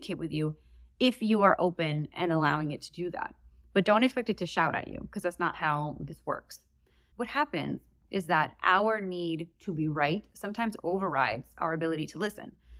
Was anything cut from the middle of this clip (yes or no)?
no